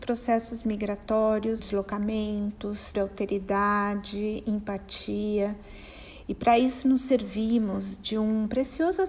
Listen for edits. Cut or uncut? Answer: cut